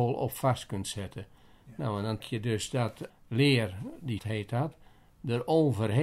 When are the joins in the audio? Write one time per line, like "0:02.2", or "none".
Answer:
0:02.2
0:03.1
0:04.2